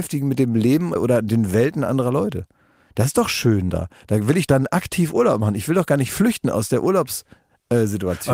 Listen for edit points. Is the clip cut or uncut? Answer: cut